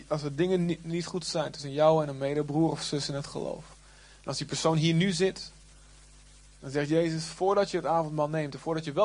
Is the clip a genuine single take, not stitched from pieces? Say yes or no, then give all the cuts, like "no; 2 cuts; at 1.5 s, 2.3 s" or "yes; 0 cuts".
yes; 0 cuts